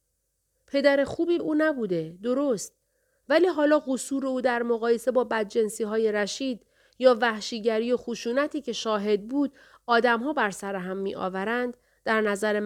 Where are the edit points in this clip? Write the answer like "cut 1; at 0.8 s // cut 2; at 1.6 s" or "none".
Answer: cut 1; at 1.4 s